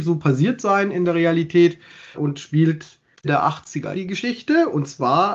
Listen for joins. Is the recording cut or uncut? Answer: cut